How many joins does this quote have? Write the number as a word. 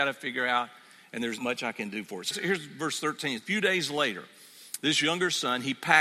three